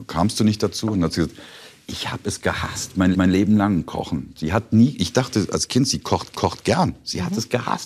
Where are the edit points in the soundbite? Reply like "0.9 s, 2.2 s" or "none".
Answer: 3.1 s, 6.3 s